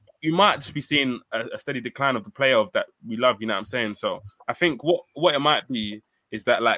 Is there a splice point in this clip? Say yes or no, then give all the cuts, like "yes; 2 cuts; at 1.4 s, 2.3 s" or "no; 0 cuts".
no; 0 cuts